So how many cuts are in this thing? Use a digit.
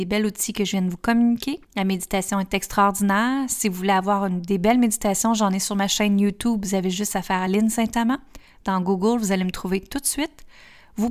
1